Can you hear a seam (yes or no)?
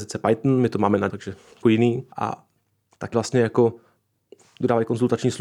yes